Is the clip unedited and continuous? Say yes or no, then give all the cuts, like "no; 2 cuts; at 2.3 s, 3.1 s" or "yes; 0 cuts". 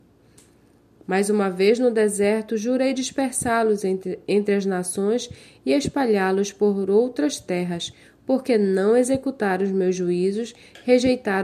yes; 0 cuts